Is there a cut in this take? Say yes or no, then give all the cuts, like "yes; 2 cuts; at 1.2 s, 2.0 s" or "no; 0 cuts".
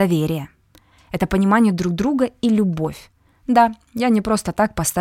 no; 0 cuts